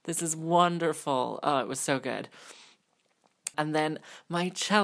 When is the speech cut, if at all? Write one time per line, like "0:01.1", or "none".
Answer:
0:03.5